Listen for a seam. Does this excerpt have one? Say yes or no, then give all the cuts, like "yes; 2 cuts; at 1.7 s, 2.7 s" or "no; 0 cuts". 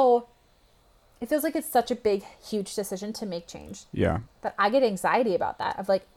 no; 0 cuts